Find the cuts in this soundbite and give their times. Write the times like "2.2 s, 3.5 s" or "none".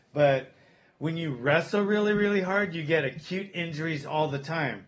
none